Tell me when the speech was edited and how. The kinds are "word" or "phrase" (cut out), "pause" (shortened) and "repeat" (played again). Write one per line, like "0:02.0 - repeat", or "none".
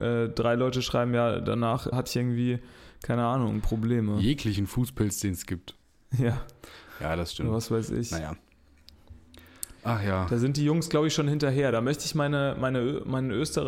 0:01.9 - word
0:05.8 - pause